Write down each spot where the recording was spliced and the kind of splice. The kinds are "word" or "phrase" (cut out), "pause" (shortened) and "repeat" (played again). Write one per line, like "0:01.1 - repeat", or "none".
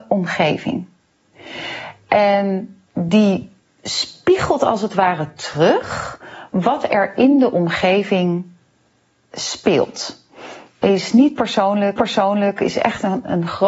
0:12.0 - repeat